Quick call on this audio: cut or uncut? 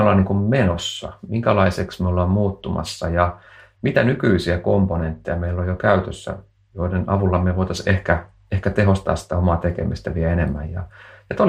uncut